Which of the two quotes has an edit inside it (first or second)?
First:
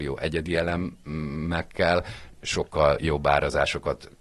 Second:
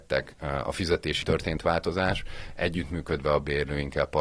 second